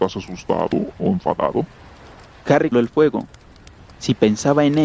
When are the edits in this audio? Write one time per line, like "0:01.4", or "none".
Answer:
0:02.7